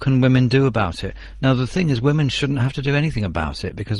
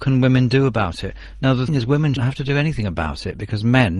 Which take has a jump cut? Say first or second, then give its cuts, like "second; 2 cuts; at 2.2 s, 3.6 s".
second; 2 cuts; at 1.7 s, 2.2 s